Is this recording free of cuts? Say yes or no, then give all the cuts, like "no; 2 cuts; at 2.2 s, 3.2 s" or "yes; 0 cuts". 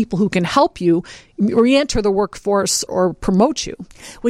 no; 1 cut; at 2.9 s